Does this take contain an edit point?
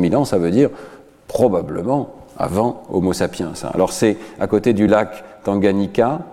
no; 0 cuts

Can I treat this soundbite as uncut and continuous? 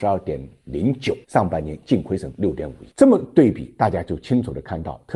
no; 2 cuts; at 1.2 s, 2.9 s

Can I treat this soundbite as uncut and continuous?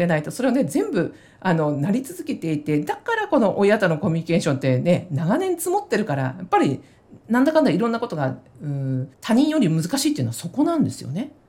no; 1 cut; at 9.1 s

